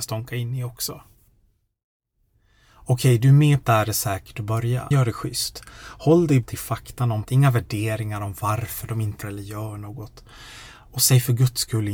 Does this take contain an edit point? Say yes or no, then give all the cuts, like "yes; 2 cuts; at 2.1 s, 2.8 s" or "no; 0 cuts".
yes; 5 cuts; at 3.6 s, 4.9 s, 6.4 s, 7.2 s, 9.2 s